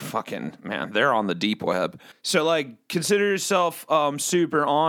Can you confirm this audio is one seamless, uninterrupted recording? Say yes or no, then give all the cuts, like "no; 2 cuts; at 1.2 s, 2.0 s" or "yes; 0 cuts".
no; 1 cut; at 2.1 s